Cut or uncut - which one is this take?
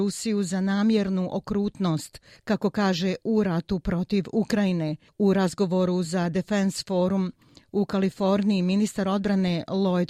uncut